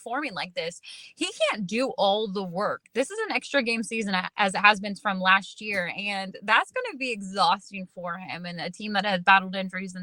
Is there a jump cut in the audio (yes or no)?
no